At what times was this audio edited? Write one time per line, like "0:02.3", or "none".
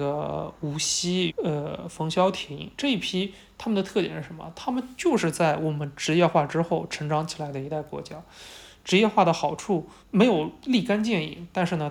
0:01.3
0:10.0